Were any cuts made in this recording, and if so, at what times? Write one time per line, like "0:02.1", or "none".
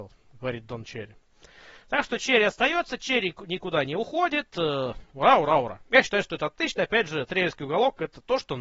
none